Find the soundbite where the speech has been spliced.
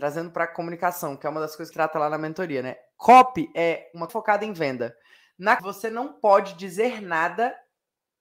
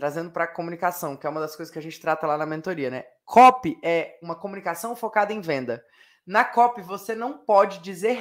first; 3 cuts; at 1.7 s, 4.1 s, 5.6 s

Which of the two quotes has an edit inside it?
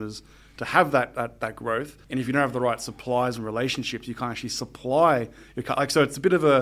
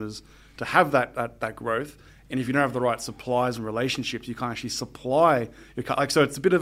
first; 1 cut; at 2.0 s

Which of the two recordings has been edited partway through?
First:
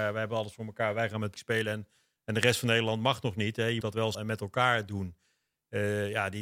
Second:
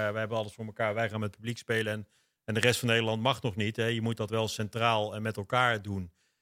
first; 3 cuts; at 1.4 s, 3.8 s, 4.1 s

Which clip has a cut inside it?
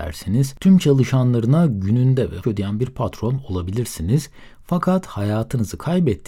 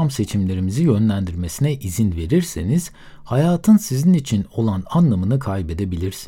first; 1 cut; at 2.4 s

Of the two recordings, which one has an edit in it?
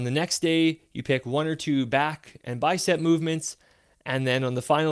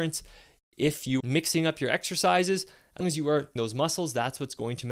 second; 3 cuts; at 1.2 s, 3.0 s, 3.6 s

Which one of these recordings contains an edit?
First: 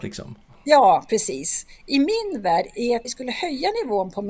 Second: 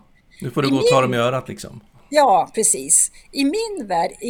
first; 1 cut; at 3.0 s

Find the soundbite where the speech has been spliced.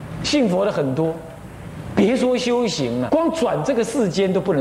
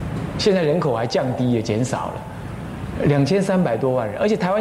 first; 1 cut; at 3.1 s

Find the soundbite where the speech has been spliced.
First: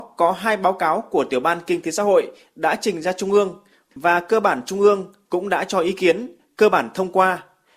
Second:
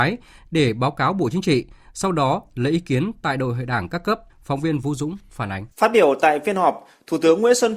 second; 2 cuts; at 4.3 s, 5.7 s

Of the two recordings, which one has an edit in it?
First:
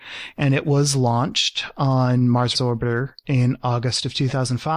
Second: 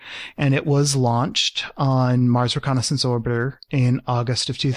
first; 1 cut; at 2.5 s

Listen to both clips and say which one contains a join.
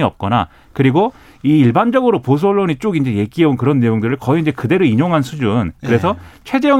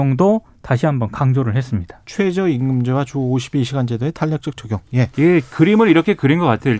second; 1 cut; at 5.1 s

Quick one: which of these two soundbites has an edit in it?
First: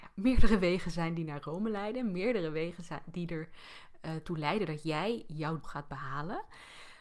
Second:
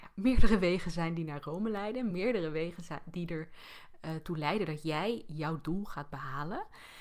first; 1 cut; at 5.6 s

